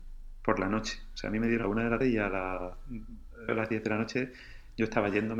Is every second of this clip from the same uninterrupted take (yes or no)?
no